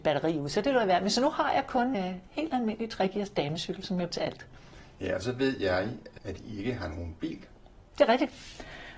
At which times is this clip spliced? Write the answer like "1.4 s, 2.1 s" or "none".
1.9 s, 4.1 s, 6.2 s